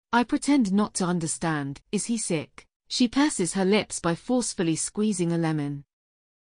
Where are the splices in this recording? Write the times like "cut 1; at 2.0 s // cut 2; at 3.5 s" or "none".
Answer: cut 1; at 1.8 s // cut 2; at 2.8 s